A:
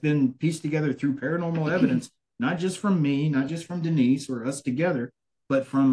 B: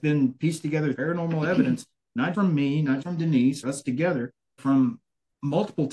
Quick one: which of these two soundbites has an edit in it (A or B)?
B